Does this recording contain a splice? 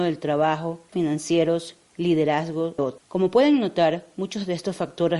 yes; 2 cuts; at 0.9 s, 2.8 s

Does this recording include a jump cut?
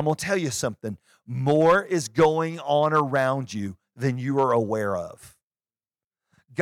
no; 0 cuts

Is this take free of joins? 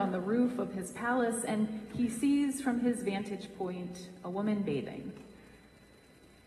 yes; 0 cuts

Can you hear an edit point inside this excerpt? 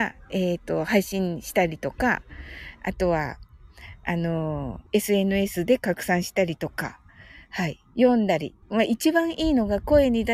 yes; 2 cuts; at 4.9 s, 8.6 s

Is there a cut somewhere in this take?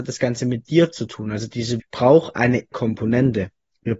yes; 2 cuts; at 1.8 s, 2.7 s

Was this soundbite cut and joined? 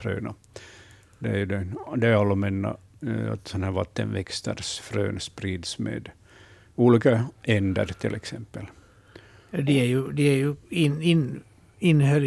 no; 0 cuts

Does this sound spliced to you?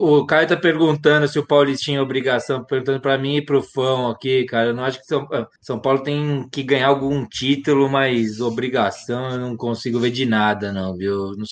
yes; 1 cut; at 5.6 s

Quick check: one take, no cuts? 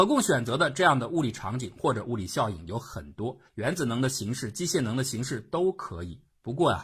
no; 1 cut; at 3.5 s

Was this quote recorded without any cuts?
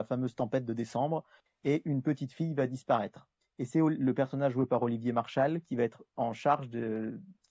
yes; 0 cuts

